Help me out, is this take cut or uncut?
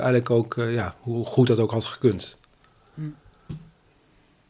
uncut